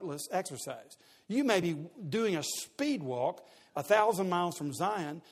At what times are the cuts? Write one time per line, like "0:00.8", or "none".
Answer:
none